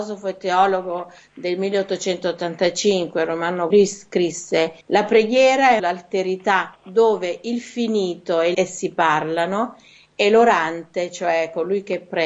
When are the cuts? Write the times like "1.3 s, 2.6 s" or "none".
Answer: 3.7 s, 4.8 s, 5.8 s, 8.5 s